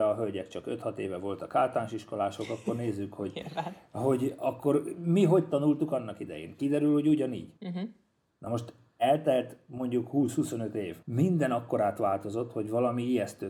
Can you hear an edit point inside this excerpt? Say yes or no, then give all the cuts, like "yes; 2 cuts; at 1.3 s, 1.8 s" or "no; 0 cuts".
yes; 2 cuts; at 7.6 s, 11.0 s